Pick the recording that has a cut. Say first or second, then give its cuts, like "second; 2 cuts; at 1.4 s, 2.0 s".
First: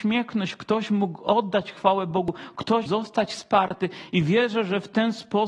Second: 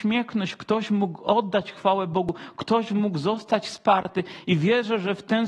first; 1 cut; at 2.9 s